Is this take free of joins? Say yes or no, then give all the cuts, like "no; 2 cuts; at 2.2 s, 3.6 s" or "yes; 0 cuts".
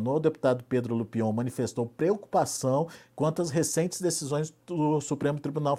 yes; 0 cuts